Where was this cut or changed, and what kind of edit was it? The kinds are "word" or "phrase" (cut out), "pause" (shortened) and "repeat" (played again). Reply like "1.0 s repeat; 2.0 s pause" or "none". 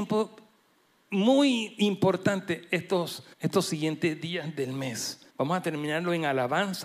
3.3 s pause; 5.3 s pause